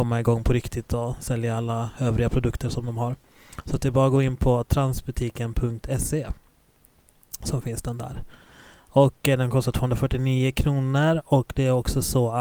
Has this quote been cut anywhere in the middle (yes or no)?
no